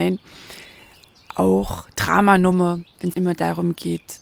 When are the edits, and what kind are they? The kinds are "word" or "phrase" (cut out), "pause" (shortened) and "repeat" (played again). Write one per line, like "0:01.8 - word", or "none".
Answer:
0:01.9 - word
0:03.1 - word